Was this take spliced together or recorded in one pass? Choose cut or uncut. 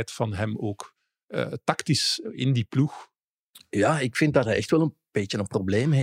uncut